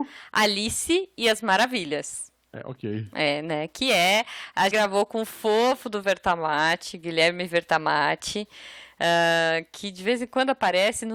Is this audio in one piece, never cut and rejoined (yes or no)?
no